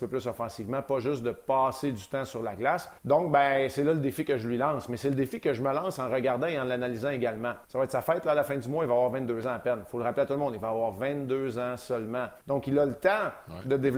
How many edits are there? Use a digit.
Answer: 3